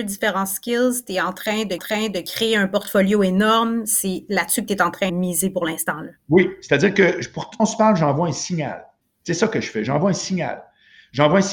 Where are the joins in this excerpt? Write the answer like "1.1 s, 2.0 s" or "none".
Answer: 1.8 s, 5.1 s, 7.6 s, 9.0 s